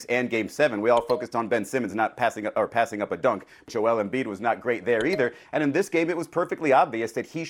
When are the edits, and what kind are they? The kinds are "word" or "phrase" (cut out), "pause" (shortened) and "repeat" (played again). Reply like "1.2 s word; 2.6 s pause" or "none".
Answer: 3.7 s word